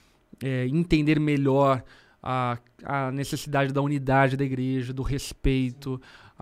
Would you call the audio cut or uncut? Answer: uncut